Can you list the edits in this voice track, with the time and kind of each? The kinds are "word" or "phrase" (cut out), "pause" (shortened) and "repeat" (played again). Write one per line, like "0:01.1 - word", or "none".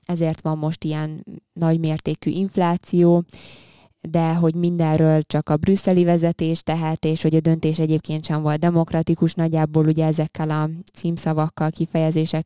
none